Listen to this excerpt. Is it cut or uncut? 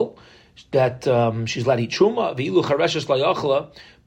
uncut